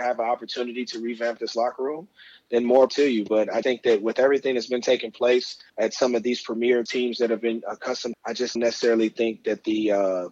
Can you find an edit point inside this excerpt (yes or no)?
yes